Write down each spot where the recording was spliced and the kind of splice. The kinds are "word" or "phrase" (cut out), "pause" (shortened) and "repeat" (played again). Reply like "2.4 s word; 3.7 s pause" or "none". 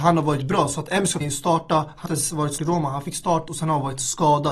1.2 s word; 2.1 s word; 2.6 s word; 3.5 s word